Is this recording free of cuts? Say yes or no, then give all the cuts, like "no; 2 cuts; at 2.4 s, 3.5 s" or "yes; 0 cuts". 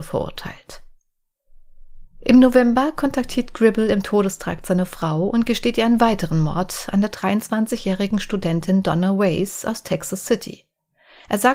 no; 1 cut; at 2.1 s